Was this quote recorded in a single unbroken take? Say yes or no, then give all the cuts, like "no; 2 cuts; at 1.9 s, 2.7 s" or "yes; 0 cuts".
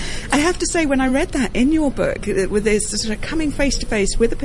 yes; 0 cuts